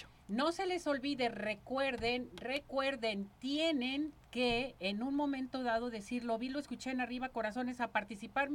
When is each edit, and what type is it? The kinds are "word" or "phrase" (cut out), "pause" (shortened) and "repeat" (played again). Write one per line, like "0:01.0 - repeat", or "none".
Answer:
none